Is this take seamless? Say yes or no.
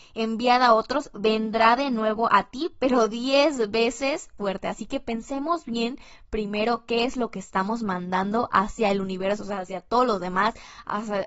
no